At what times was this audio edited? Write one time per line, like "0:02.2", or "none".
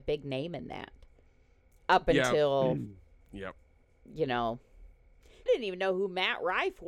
0:05.5